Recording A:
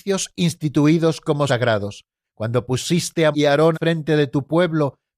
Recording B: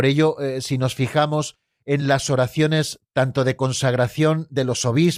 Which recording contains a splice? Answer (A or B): A